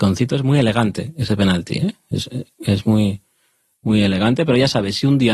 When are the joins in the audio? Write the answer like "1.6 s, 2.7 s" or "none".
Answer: none